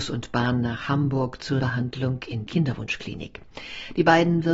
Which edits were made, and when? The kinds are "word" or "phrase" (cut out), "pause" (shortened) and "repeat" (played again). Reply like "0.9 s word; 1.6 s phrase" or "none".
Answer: 1.6 s word; 2.5 s word